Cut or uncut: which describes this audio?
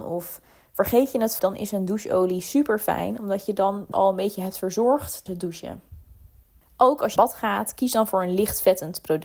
cut